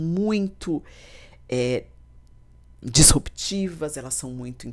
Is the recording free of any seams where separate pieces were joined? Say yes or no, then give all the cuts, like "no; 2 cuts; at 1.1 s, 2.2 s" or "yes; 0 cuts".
no; 1 cut; at 2.8 s